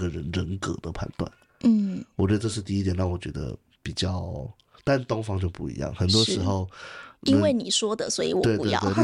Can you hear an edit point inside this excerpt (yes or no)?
no